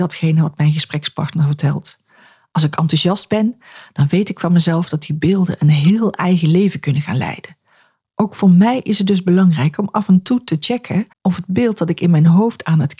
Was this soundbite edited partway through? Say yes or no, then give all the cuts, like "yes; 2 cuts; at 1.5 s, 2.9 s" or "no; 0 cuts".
yes; 1 cut; at 11.1 s